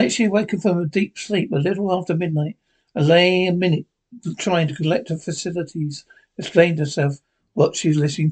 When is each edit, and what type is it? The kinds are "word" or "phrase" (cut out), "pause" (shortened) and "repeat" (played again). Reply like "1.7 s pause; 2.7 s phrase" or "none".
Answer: none